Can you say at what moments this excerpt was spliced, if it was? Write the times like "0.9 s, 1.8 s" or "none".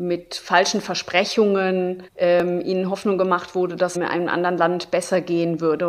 2.1 s, 3.9 s